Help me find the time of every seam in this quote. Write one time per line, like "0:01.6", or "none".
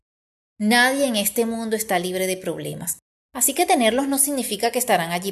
none